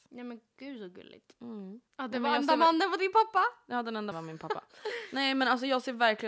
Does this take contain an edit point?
yes; 2 cuts; at 1.9 s, 4.1 s

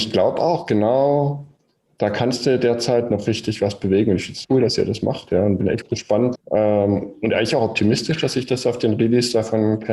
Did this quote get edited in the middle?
yes; 2 cuts; at 4.4 s, 6.4 s

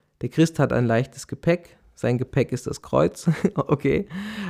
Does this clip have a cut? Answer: no; 0 cuts

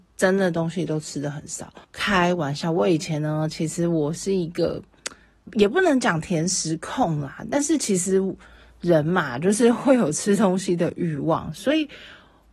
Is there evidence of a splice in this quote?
yes; 2 cuts; at 1.8 s, 5.5 s

